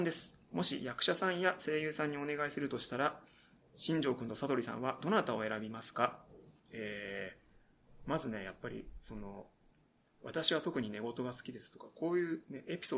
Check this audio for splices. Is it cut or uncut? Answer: cut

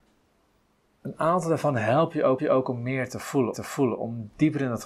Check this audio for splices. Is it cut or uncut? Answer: cut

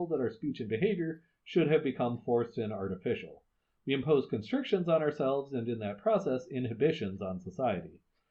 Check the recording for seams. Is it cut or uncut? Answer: uncut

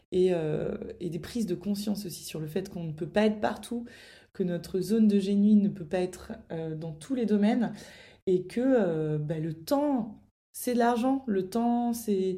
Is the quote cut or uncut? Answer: uncut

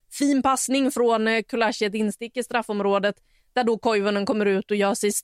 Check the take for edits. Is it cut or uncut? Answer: uncut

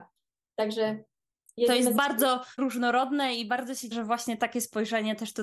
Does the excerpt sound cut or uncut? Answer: cut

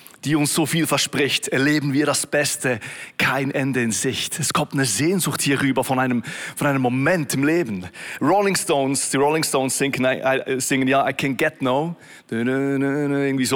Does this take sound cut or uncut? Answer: uncut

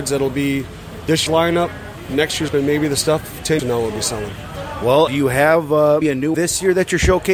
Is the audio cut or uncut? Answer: cut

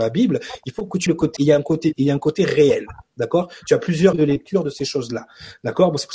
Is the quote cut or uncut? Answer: cut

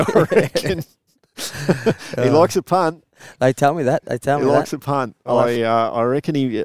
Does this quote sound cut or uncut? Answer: uncut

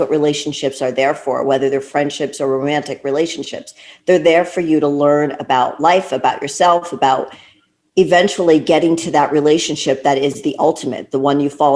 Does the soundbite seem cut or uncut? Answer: uncut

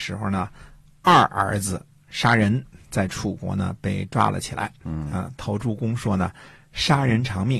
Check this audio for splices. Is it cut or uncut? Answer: uncut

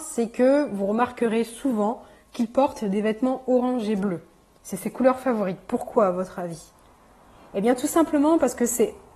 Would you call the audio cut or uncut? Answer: uncut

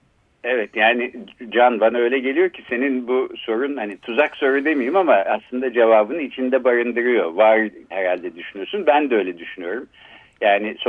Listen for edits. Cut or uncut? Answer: cut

